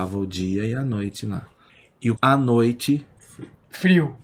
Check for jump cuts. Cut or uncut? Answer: cut